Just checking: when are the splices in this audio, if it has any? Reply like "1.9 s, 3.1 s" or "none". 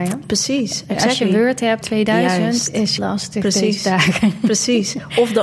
1.8 s, 3.0 s

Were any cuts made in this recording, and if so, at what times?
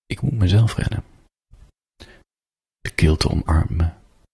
none

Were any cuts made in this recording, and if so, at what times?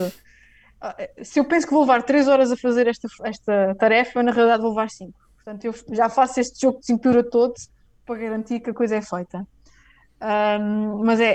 none

